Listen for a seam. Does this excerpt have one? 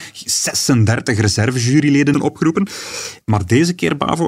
yes; 2 cuts; at 2.1 s, 3.2 s

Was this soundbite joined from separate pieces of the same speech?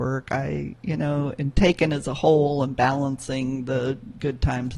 no; 0 cuts

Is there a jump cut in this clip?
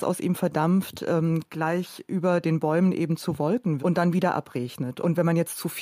yes; 1 cut; at 3.8 s

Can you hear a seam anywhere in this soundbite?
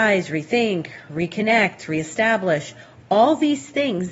no; 0 cuts

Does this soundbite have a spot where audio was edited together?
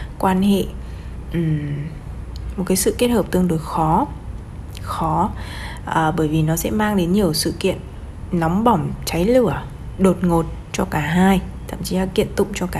no; 0 cuts

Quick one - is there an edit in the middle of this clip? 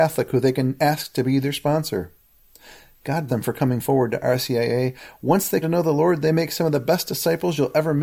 yes; 2 cuts; at 3.3 s, 5.6 s

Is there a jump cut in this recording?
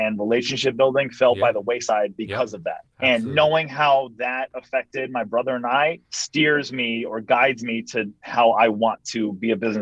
yes; 2 cuts; at 2.9 s, 6.0 s

